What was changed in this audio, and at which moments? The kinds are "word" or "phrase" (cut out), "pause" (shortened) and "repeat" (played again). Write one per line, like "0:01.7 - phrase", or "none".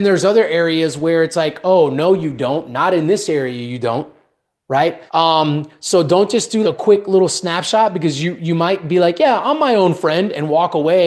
0:05.1 - pause
0:06.6 - word